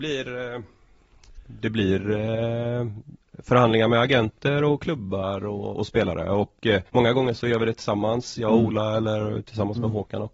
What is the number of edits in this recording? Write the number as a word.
two